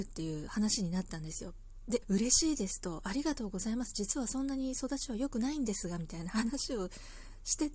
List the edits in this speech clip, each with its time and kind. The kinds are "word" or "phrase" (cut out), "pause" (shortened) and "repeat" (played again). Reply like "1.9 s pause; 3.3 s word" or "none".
2.0 s word